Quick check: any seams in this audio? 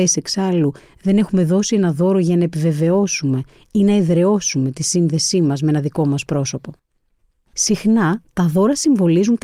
no; 0 cuts

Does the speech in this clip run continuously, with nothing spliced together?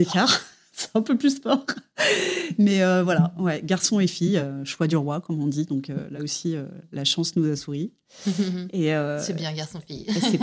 yes; 0 cuts

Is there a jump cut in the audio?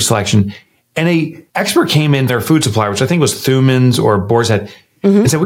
yes; 2 cuts; at 1.5 s, 2.3 s

